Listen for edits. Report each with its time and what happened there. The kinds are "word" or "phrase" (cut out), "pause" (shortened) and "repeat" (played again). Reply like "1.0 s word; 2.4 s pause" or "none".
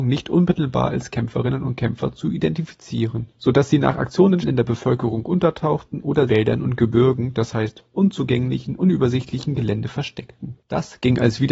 4.4 s word; 6.3 s phrase